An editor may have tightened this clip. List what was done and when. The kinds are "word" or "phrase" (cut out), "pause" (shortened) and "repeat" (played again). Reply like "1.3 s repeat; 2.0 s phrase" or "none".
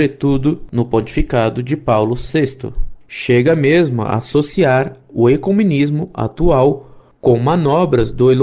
none